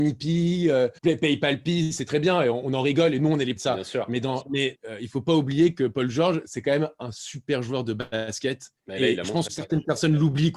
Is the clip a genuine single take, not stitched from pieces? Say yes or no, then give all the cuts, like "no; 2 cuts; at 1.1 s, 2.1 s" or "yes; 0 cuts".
no; 5 cuts; at 1.0 s, 3.6 s, 4.7 s, 8.8 s, 9.5 s